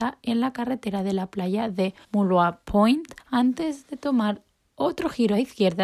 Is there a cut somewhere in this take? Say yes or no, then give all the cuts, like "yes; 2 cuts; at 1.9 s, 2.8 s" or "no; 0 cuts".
yes; 2 cuts; at 2.0 s, 3.2 s